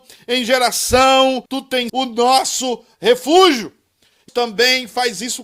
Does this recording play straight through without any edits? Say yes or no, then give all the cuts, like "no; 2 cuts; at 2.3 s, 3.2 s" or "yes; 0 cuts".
no; 3 cuts; at 1.5 s, 1.9 s, 4.3 s